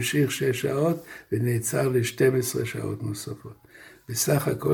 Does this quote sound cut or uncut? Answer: uncut